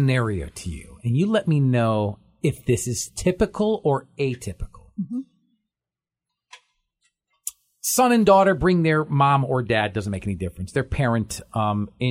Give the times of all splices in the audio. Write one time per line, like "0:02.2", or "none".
none